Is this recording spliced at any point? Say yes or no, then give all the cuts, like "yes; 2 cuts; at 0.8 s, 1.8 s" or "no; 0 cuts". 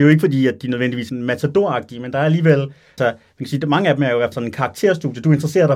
yes; 3 cuts; at 1.1 s, 3.0 s, 4.3 s